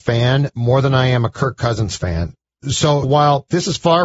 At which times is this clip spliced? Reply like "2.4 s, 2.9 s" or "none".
3.0 s